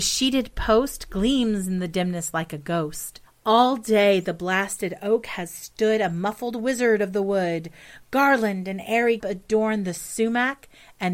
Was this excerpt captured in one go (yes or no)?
no